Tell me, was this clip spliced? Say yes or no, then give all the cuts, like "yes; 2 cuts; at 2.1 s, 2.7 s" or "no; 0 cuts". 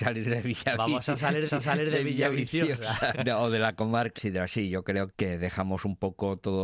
yes; 4 cuts; at 1.5 s, 3.1 s, 4.1 s, 5.1 s